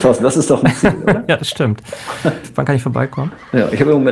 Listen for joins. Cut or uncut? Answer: uncut